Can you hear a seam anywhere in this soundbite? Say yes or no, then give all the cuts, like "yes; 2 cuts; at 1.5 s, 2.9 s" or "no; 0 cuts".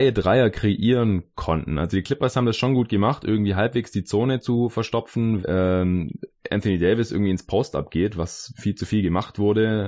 yes; 1 cut; at 5.4 s